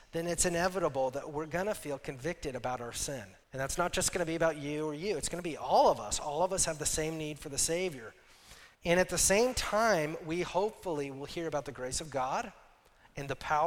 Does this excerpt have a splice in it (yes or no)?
yes